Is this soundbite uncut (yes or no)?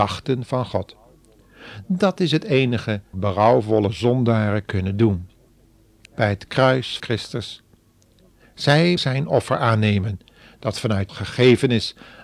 no